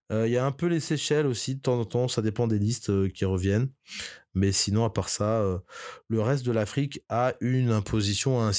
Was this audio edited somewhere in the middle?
no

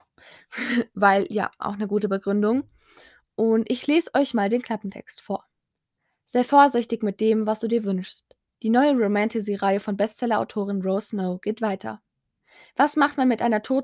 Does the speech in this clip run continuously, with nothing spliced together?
yes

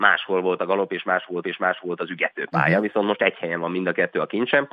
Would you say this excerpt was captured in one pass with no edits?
no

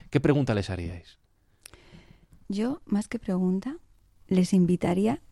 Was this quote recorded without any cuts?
yes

